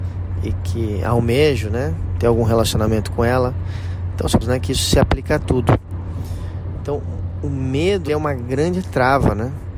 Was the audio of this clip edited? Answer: yes; 2 cuts; at 4.4 s, 8.1 s

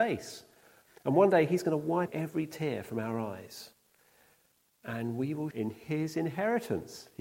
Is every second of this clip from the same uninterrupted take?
no; 2 cuts; at 2.1 s, 5.5 s

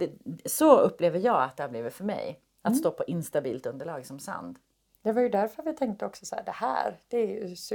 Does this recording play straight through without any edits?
yes; 0 cuts

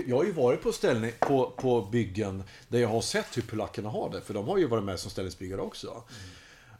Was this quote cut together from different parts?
no; 0 cuts

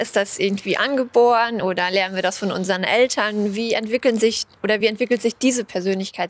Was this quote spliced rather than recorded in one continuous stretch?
no; 0 cuts

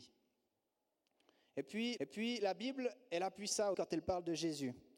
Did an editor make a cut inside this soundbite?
yes; 2 cuts; at 2.0 s, 3.7 s

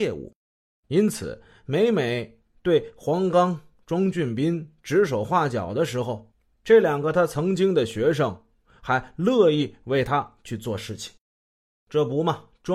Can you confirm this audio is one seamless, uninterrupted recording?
yes; 0 cuts

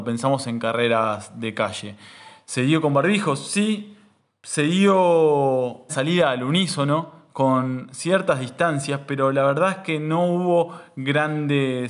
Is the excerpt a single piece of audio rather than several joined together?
no; 1 cut; at 5.9 s

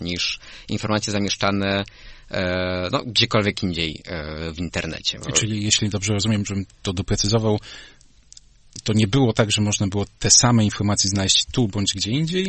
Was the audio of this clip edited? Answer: no; 0 cuts

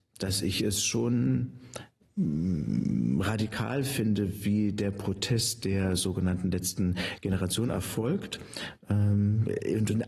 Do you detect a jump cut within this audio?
no; 0 cuts

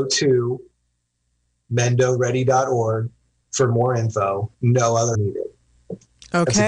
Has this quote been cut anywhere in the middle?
yes; 3 cuts; at 3.2 s, 4.5 s, 5.1 s

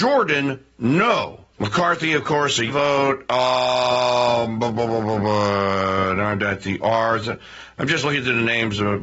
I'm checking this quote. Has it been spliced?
yes; 2 cuts; at 1.5 s, 2.7 s

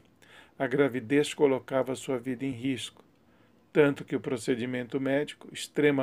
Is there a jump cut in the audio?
no; 0 cuts

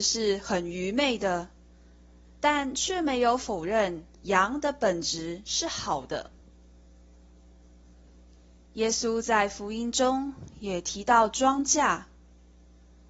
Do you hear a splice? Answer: yes; 1 cut; at 4.1 s

